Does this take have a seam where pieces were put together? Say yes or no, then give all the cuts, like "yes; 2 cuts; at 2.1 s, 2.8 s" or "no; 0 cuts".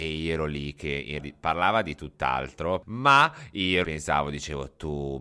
yes; 2 cuts; at 1.2 s, 3.8 s